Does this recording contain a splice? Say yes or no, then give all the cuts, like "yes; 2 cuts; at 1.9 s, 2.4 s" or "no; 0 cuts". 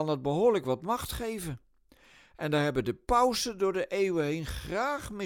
no; 0 cuts